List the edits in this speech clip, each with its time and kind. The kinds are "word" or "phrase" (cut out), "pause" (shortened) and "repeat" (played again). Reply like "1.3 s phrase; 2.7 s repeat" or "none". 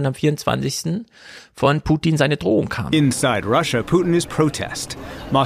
4.3 s word